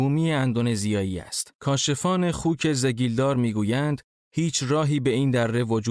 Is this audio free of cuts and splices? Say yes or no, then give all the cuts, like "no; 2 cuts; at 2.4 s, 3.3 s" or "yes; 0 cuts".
no; 1 cut; at 1.6 s